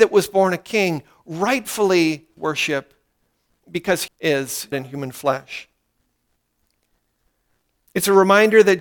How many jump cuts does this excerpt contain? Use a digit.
3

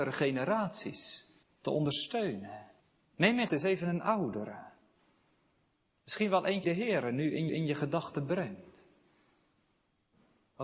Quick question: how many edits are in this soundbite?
5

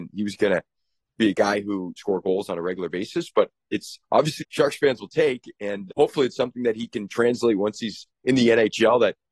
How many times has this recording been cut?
3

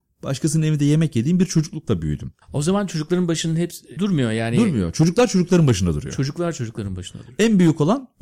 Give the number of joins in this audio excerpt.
2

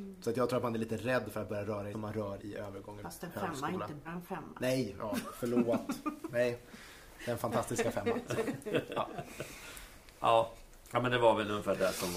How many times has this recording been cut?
4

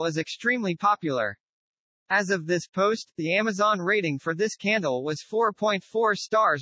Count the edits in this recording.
0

